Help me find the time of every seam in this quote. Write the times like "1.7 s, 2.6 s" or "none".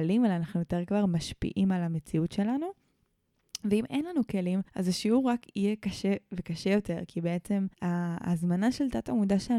4.7 s, 7.7 s